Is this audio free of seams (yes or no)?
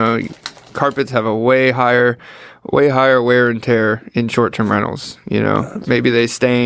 yes